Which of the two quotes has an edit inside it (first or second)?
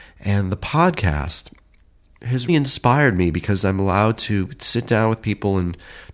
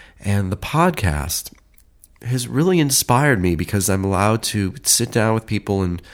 first